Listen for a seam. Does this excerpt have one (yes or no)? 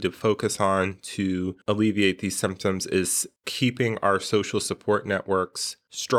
no